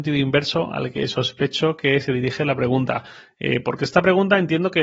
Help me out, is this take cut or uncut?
uncut